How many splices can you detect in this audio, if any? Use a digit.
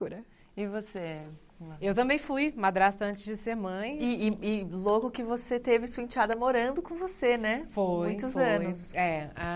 0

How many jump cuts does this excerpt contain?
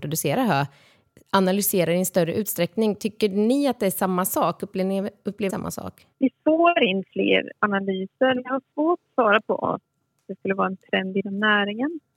3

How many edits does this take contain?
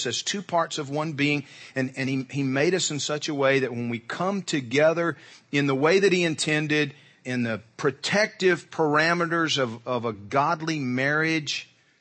0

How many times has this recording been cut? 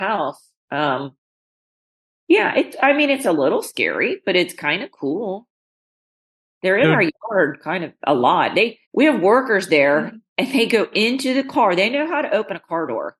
2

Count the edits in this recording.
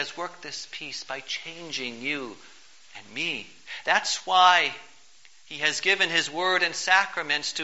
0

